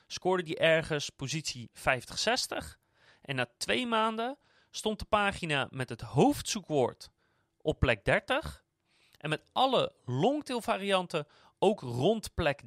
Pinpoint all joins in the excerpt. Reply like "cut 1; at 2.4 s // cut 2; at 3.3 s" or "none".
none